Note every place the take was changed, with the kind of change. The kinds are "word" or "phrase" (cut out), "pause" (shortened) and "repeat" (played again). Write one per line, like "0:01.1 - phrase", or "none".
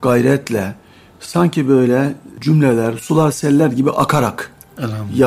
none